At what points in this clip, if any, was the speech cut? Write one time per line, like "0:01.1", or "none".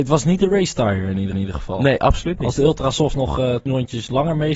0:01.3
0:03.7